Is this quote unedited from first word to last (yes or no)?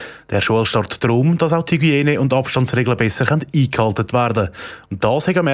yes